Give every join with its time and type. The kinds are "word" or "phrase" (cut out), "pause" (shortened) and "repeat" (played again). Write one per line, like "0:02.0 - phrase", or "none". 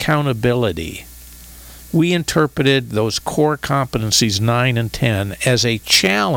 none